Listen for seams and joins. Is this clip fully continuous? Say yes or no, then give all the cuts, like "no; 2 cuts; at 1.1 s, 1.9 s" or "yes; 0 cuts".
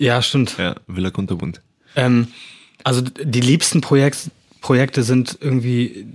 yes; 0 cuts